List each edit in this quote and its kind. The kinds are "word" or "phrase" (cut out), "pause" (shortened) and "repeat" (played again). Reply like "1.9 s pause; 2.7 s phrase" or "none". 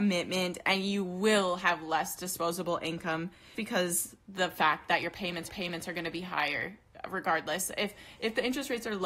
3.5 s word; 5.5 s repeat